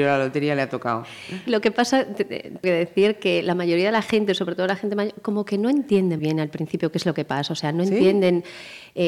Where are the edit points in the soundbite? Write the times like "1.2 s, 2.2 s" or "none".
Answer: 1.5 s, 2.6 s, 6.2 s